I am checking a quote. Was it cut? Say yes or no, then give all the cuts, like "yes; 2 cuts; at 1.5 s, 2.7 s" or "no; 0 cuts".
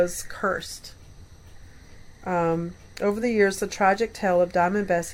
no; 0 cuts